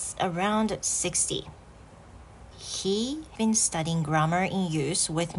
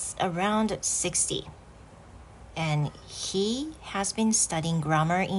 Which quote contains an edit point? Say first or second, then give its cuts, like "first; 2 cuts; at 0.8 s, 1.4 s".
first; 2 cuts; at 2.5 s, 3.4 s